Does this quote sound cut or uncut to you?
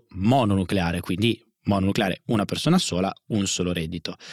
uncut